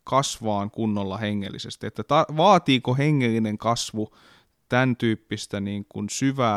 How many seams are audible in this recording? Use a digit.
0